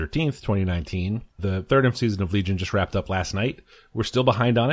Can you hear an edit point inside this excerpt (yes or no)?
yes